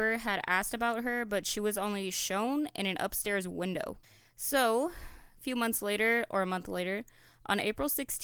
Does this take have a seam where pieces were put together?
no; 0 cuts

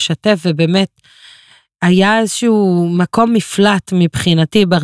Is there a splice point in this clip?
no; 0 cuts

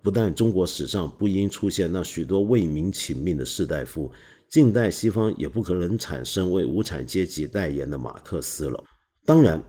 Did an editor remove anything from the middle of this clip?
no; 0 cuts

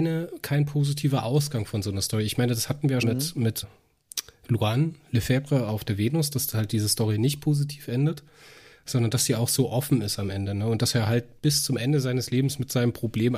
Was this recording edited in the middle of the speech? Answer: yes; 2 cuts; at 3.0 s, 3.6 s

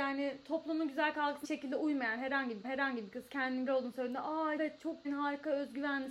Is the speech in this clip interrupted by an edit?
yes; 5 cuts; at 1.4 s, 2.6 s, 3.7 s, 4.6 s, 5.0 s

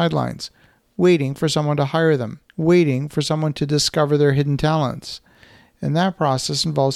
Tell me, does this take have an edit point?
yes; 1 cut; at 2.5 s

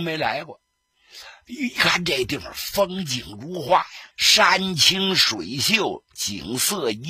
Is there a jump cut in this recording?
yes; 1 cut; at 4.1 s

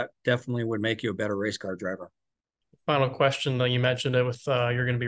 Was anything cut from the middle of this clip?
no; 0 cuts

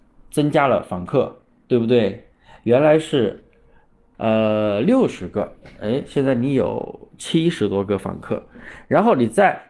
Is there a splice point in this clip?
no; 0 cuts

